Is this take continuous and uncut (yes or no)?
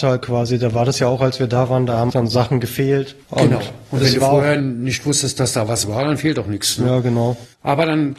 no